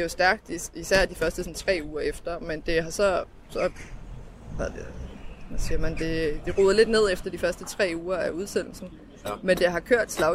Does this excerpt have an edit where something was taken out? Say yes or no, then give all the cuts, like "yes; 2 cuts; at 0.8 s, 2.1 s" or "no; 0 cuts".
no; 0 cuts